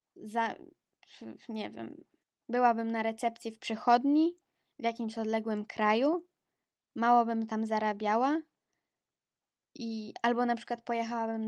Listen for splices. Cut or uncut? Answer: cut